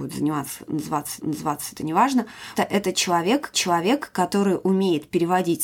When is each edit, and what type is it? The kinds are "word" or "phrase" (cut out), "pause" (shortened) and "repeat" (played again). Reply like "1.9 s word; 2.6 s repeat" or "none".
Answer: 1.2 s repeat; 2.6 s word; 3.5 s repeat